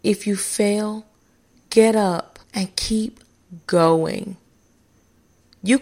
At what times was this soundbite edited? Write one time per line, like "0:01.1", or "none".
0:02.4